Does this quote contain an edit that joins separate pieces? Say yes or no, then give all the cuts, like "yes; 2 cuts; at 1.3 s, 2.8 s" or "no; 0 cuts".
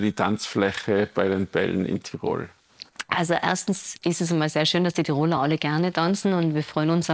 no; 0 cuts